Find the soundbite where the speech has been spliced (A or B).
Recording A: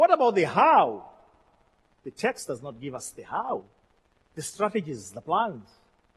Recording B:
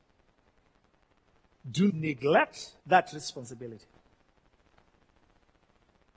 B